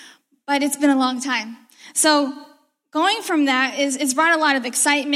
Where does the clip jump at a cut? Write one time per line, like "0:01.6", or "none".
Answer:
none